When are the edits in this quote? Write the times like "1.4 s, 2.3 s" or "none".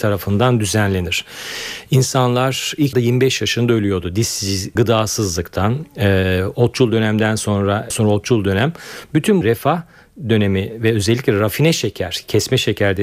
2.9 s, 4.8 s, 7.9 s, 9.4 s